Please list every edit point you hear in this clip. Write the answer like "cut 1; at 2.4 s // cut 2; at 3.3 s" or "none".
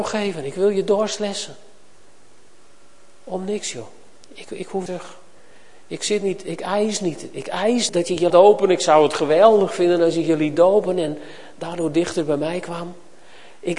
cut 1; at 4.9 s // cut 2; at 7.9 s // cut 3; at 8.3 s

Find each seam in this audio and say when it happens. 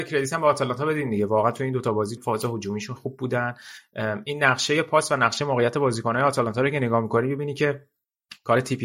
cut 1; at 2.2 s // cut 2; at 3.0 s

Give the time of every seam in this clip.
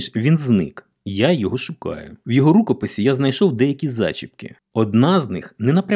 cut 1; at 2.2 s // cut 2; at 4.6 s

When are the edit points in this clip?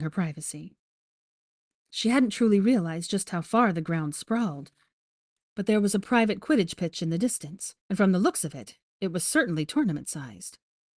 cut 1; at 7.8 s

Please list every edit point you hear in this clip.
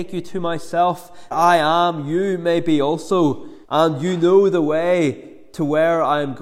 cut 1; at 1.3 s // cut 2; at 3.6 s

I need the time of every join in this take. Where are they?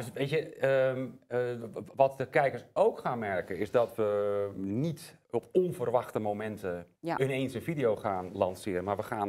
cut 1; at 5.2 s // cut 2; at 7.0 s

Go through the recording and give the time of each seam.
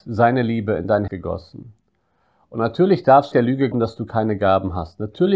cut 1; at 1.1 s // cut 2; at 3.3 s // cut 3; at 3.7 s

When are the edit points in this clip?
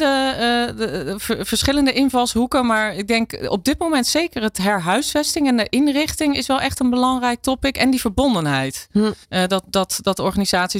cut 1; at 9.2 s

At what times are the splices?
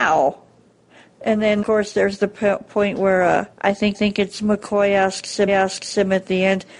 cut 1; at 1.6 s // cut 2; at 3.5 s // cut 3; at 3.9 s // cut 4; at 5.5 s

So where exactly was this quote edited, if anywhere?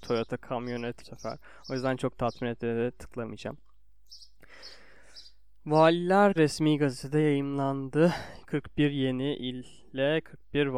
cut 1; at 1.0 s // cut 2; at 6.4 s

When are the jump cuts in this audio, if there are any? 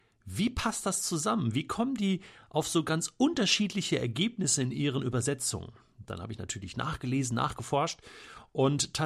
none

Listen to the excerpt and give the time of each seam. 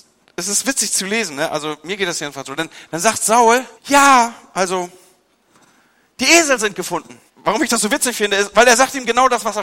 cut 1; at 3.8 s // cut 2; at 7.3 s

